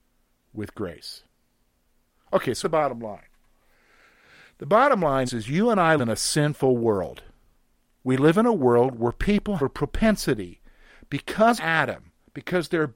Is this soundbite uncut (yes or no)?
no